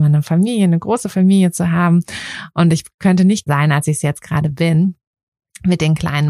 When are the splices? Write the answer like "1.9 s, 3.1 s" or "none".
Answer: 3.5 s